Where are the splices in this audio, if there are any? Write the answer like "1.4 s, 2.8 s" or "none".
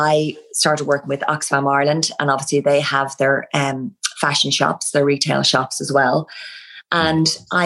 none